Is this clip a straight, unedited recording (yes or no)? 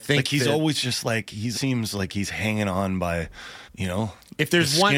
no